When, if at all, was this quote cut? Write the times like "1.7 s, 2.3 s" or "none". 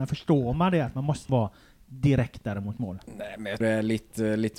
1.3 s, 3.6 s